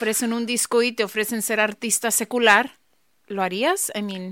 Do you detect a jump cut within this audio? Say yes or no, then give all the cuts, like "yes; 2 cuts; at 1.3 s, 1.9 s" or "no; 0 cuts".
no; 0 cuts